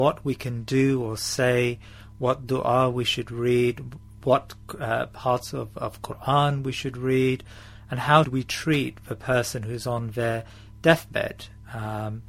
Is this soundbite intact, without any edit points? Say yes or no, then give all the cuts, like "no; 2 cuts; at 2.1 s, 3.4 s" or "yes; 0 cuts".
no; 1 cut; at 8.2 s